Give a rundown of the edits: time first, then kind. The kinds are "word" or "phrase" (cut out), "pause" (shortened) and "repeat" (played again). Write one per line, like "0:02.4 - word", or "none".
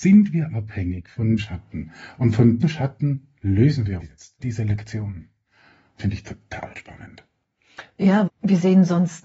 0:01.4 - word
0:02.6 - word
0:04.0 - word
0:04.4 - word
0:06.0 - word
0:08.3 - word